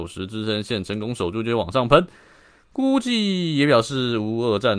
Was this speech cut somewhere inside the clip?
no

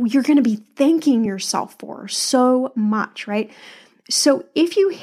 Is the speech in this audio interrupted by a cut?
no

